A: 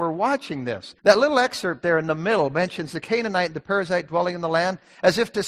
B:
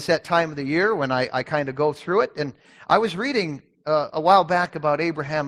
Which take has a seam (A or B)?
A